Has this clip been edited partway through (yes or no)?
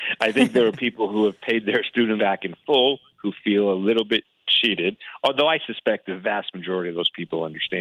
yes